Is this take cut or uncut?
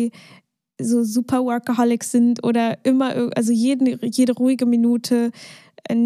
uncut